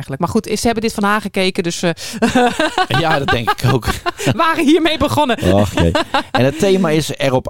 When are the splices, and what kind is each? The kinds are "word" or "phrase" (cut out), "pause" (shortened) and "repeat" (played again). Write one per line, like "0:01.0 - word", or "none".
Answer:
0:01.0 - word
0:04.4 - word